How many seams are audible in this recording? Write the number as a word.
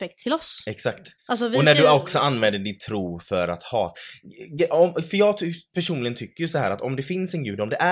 one